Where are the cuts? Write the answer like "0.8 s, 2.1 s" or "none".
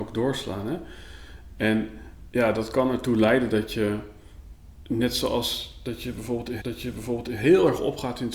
6.6 s